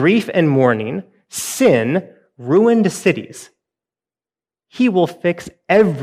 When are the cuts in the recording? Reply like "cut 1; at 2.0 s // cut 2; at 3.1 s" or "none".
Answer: none